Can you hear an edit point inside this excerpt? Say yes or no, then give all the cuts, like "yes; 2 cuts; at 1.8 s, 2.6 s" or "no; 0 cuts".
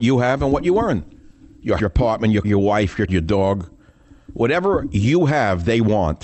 yes; 3 cuts; at 1.8 s, 2.4 s, 3.1 s